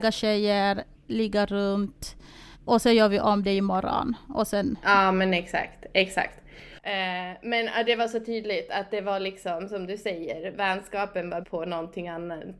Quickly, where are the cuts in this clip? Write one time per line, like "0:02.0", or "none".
0:02.5
0:11.4